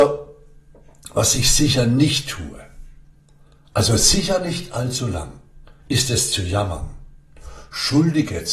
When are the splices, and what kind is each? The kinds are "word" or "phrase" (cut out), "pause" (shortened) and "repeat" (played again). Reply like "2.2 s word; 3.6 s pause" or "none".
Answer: 5.8 s pause

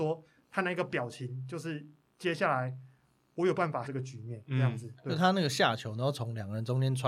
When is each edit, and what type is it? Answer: 3.8 s word

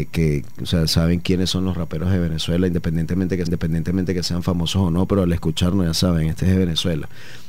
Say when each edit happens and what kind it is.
3.5 s repeat

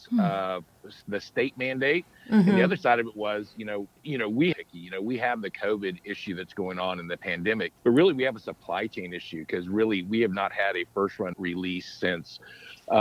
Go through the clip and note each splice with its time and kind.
4.0 s pause; 4.5 s phrase; 7.8 s pause; 11.3 s word

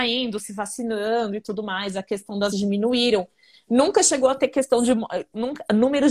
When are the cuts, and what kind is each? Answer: 2.5 s word

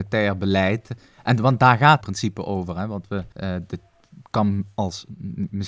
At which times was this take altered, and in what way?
2.0 s phrase; 3.3 s pause

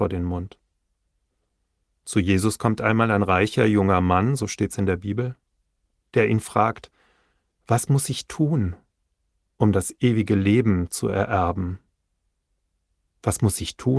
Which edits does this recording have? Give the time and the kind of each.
none

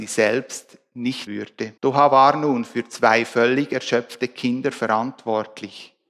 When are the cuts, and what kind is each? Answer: 1.3 s word; 1.8 s pause

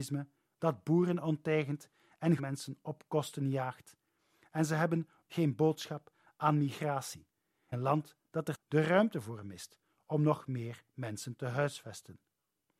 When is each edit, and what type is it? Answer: 2.4 s word; 5.2 s word; 7.7 s word; 8.5 s word

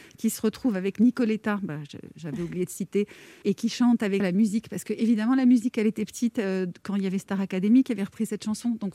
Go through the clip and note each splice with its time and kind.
3.4 s word; 4.2 s word

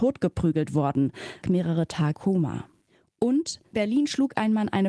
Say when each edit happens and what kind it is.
1.4 s word; 2.1 s word; 3.7 s word

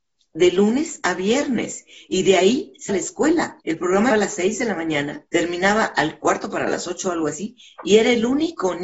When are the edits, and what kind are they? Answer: 2.9 s word; 3.6 s pause; 4.1 s word; 5.3 s pause

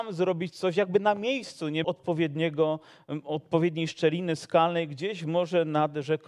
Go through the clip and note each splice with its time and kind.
1.8 s word

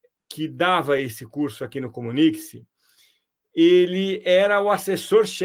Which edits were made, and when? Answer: none

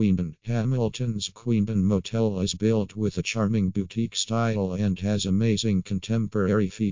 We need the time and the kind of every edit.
none

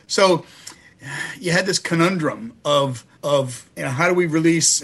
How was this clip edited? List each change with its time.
3.1 s pause

